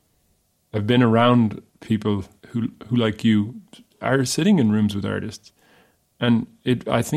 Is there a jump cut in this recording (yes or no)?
no